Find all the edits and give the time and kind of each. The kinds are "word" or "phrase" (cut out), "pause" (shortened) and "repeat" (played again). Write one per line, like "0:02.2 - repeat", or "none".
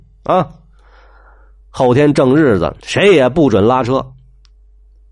0:02.8 - pause